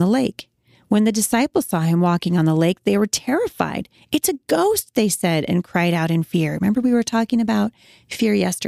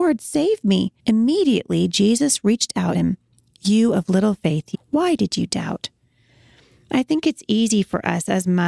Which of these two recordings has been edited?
second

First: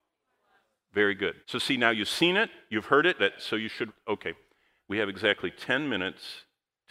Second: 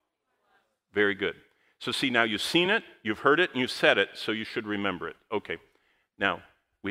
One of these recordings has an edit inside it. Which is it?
first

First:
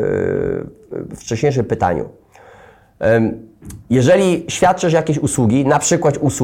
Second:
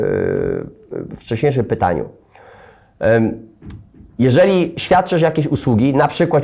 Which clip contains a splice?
first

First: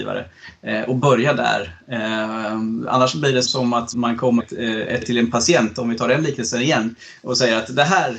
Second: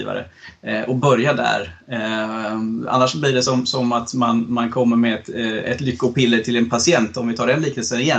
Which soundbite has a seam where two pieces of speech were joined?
first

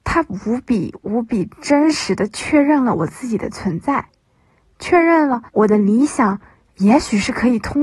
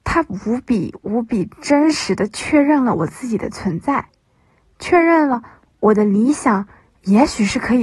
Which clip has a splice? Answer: first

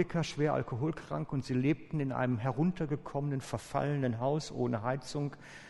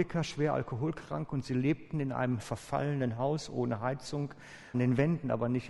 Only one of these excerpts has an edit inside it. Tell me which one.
second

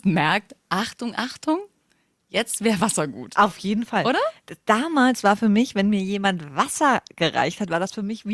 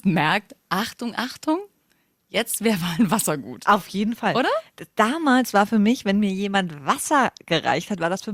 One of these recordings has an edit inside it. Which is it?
first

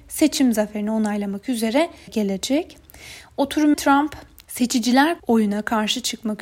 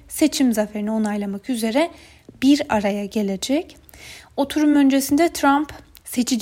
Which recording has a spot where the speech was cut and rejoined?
first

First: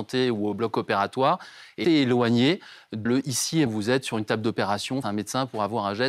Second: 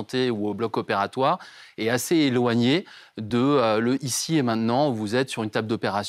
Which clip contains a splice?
first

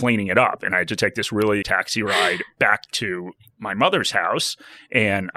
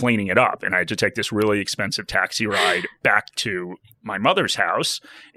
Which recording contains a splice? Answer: first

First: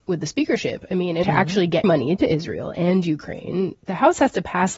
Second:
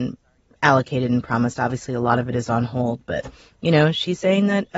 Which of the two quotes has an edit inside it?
first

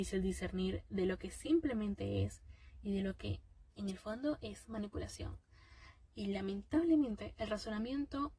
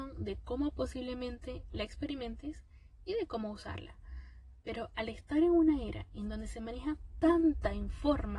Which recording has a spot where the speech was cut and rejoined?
first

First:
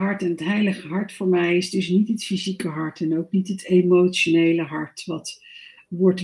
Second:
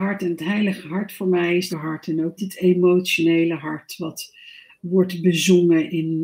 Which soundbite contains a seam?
second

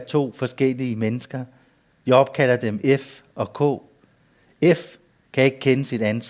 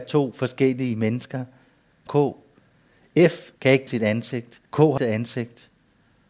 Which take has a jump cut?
second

